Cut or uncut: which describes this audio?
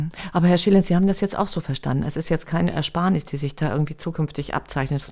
uncut